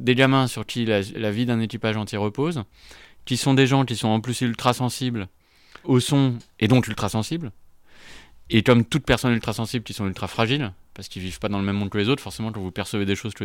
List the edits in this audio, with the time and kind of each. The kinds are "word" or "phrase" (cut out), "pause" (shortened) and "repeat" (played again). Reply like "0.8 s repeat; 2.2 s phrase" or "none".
1.1 s word; 5.8 s word